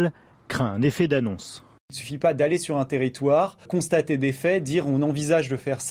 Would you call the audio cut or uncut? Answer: cut